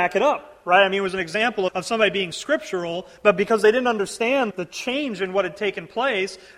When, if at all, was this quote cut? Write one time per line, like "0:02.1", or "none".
0:01.7
0:04.5